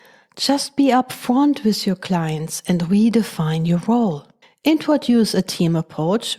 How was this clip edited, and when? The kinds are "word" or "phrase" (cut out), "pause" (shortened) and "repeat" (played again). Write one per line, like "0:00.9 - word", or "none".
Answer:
0:04.4 - pause